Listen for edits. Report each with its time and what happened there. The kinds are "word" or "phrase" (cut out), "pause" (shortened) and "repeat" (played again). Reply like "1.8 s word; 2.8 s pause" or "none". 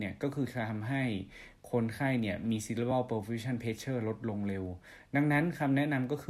none